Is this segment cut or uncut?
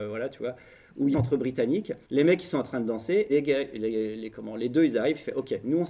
cut